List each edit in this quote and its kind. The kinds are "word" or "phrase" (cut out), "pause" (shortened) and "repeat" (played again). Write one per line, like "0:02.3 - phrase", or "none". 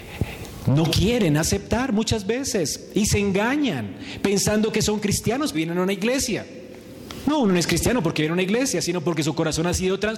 0:05.5 - word